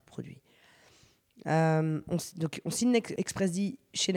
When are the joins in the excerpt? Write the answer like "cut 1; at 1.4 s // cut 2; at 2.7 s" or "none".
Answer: cut 1; at 3.2 s